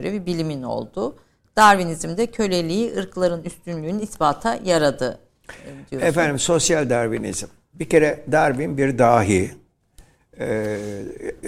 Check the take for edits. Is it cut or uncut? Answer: uncut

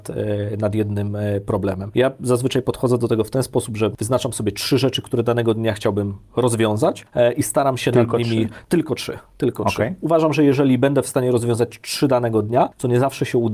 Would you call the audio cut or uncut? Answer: uncut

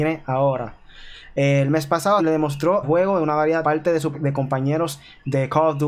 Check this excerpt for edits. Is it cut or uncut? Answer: cut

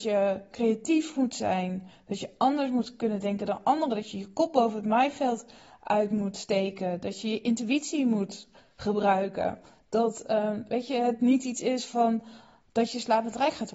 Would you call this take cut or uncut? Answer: uncut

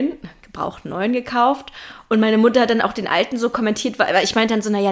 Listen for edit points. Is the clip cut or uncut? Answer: uncut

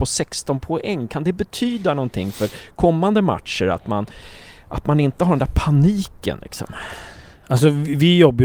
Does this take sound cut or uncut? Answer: uncut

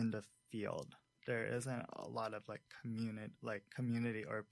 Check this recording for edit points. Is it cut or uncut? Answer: uncut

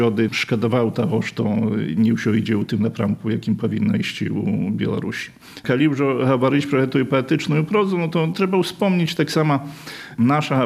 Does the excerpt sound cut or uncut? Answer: uncut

